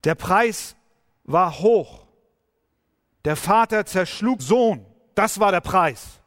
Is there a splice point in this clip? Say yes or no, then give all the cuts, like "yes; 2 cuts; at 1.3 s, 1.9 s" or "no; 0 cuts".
yes; 1 cut; at 4.4 s